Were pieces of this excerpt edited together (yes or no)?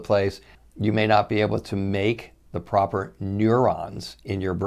no